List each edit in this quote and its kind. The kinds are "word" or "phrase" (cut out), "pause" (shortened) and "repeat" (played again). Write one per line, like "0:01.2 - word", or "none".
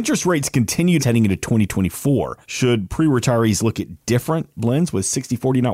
0:01.0 - phrase
0:02.4 - pause
0:04.6 - word

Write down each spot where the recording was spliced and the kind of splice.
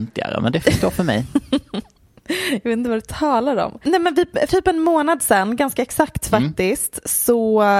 0:04.5 - word

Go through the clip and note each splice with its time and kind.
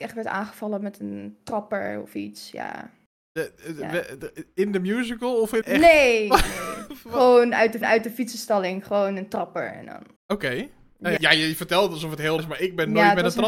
0:03.2 - pause
0:05.6 - word
0:07.8 - repeat
0:10.2 - pause
0:11.2 - word
0:12.4 - word

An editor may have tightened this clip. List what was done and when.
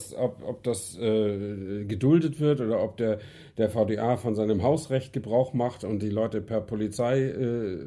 none

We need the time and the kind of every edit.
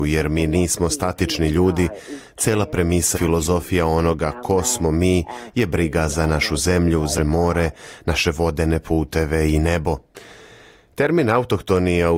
0:03.1 - word
0:07.2 - word

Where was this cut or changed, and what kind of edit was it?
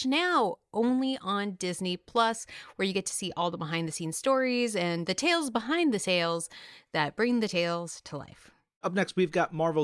none

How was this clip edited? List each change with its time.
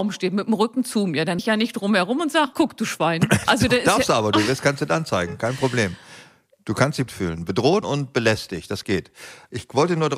0:01.4 - word
0:02.5 - word
0:07.1 - word
0:07.8 - word

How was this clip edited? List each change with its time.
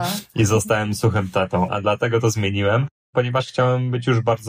0:01.7 - word

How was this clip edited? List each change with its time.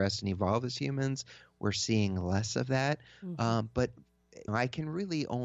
0:04.5 - word

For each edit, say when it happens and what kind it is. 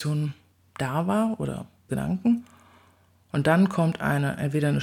0:01.9 - word

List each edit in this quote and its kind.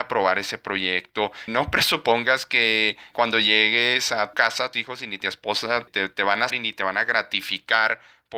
0:01.5 - word
0:03.1 - word
0:04.3 - word
0:04.7 - word
0:05.9 - word
0:06.5 - word

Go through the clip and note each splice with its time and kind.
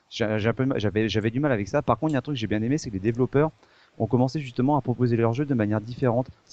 none

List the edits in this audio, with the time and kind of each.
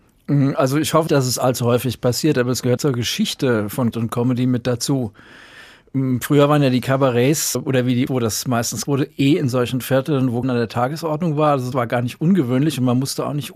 0:01.1 - word
0:02.8 - word
0:03.9 - word
0:07.5 - word
0:08.1 - word
0:08.8 - word
0:10.4 - word
0:11.7 - word

